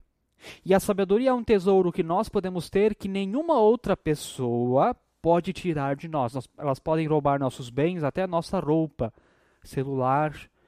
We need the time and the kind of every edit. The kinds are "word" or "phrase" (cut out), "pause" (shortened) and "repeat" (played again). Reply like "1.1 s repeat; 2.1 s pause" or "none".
none